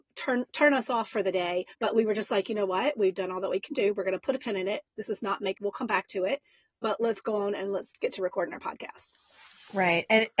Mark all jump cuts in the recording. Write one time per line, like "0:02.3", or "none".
0:01.7
0:05.6